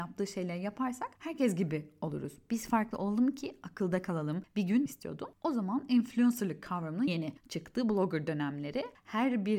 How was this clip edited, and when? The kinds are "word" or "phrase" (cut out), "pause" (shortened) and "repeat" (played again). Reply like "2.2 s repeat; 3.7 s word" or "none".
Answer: 1.1 s pause; 4.9 s phrase; 7.1 s word